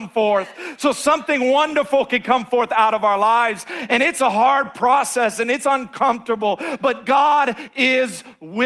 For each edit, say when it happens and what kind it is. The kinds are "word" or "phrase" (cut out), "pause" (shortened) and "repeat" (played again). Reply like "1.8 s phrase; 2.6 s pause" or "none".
none